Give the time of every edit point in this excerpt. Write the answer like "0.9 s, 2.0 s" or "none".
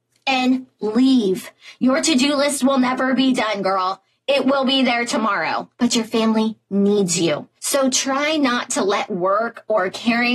5.7 s, 7.6 s